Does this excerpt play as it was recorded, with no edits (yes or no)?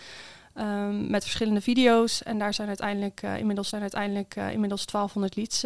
no